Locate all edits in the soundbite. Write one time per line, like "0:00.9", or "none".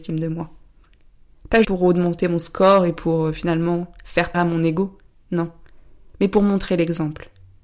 0:01.6
0:04.3